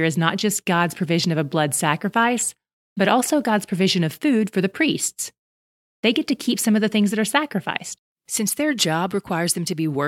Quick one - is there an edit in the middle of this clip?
no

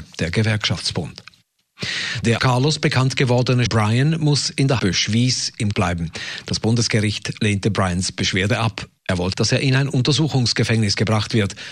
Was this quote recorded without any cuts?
no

